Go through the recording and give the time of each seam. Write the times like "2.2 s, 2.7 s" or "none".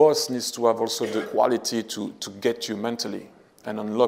1.2 s, 2.2 s